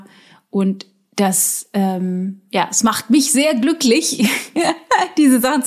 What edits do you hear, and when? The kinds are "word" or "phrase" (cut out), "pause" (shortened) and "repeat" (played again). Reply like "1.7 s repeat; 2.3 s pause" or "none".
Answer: none